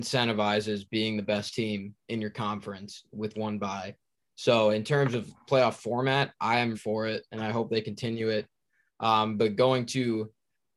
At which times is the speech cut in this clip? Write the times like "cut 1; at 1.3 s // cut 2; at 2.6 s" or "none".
cut 1; at 3.3 s // cut 2; at 5.5 s // cut 3; at 6.7 s